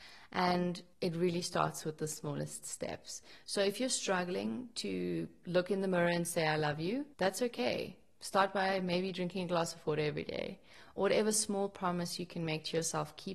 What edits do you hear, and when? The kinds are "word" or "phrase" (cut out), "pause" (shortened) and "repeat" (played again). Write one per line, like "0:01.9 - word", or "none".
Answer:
0:00.9 - pause
0:07.1 - pause